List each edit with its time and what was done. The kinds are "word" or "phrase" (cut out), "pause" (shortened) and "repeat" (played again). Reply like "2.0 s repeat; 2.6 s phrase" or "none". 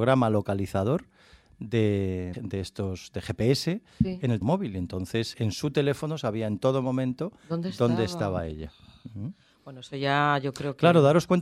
2.3 s word; 4.4 s word; 5.3 s word